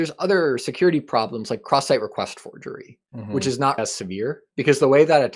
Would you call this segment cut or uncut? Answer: cut